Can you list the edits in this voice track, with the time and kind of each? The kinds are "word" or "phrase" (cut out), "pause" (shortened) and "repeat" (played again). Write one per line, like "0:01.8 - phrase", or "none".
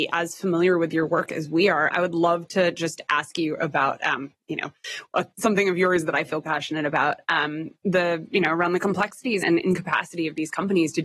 0:01.9 - word
0:06.4 - word
0:07.8 - pause
0:09.4 - word